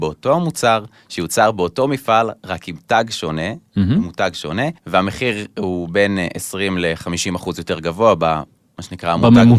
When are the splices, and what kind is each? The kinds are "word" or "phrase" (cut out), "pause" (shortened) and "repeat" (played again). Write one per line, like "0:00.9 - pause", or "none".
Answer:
0:04.8 - pause